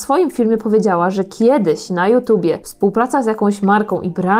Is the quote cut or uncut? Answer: uncut